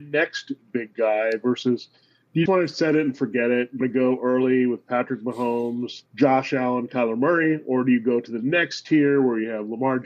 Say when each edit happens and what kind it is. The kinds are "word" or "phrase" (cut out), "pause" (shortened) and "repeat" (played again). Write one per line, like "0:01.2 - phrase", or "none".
0:02.5 - word
0:03.8 - word
0:06.1 - pause